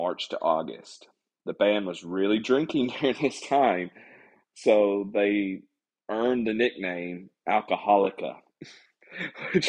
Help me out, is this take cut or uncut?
uncut